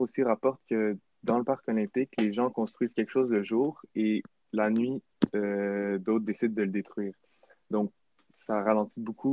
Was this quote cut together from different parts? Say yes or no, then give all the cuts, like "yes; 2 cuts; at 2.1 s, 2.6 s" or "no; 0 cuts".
no; 0 cuts